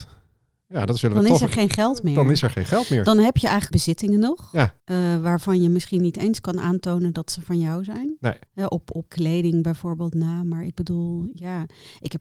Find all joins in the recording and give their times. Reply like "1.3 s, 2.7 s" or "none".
3.7 s, 4.8 s, 8.5 s, 9.1 s